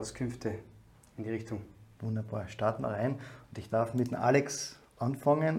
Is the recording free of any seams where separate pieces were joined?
yes; 0 cuts

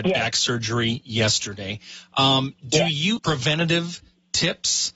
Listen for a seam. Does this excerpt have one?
yes; 1 cut; at 3.2 s

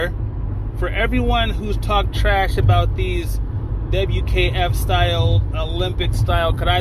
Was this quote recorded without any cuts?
yes; 0 cuts

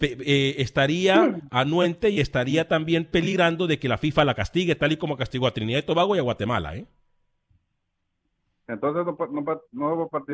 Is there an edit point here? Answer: no; 0 cuts

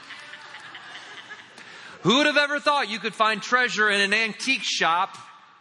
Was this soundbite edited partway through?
no; 0 cuts

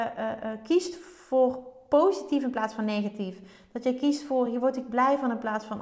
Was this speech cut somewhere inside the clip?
no; 0 cuts

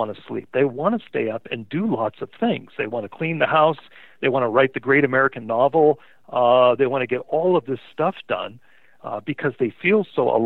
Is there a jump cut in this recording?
no; 0 cuts

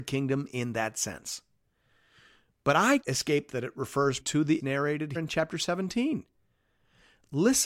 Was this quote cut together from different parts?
yes; 5 cuts; at 3.0 s, 3.5 s, 4.2 s, 4.6 s, 5.1 s

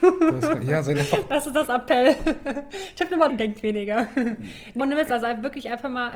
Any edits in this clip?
yes; 2 cuts; at 3.3 s, 4.8 s

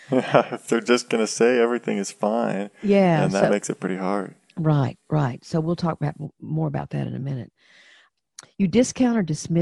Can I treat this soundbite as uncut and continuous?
yes; 0 cuts

